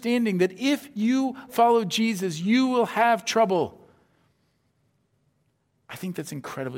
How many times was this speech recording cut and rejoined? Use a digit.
1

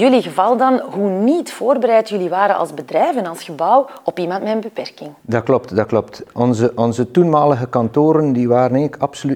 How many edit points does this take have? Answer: 0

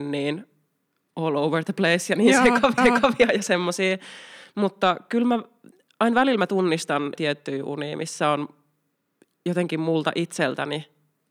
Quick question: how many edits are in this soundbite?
2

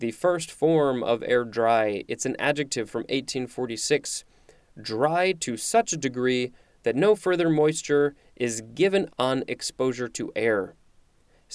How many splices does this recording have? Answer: 1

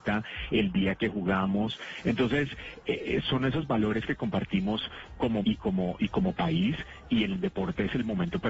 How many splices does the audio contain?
3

